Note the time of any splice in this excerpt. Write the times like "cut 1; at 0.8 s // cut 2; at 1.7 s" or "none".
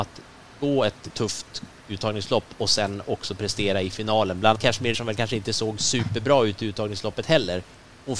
cut 1; at 1.1 s // cut 2; at 4.5 s // cut 3; at 4.9 s